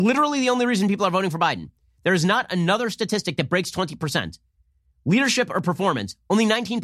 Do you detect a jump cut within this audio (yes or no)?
no